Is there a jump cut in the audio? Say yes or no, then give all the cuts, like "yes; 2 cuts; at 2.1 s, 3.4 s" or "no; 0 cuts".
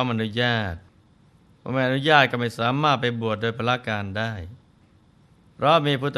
no; 0 cuts